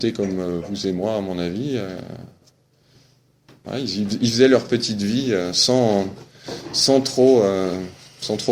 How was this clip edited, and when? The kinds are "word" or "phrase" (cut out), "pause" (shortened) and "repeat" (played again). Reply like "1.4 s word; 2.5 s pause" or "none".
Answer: none